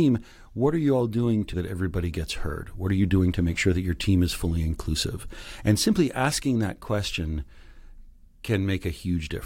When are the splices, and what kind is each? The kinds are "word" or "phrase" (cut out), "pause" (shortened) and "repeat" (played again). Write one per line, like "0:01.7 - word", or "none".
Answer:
0:01.5 - word